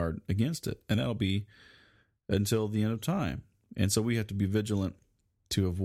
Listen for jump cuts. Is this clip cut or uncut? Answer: uncut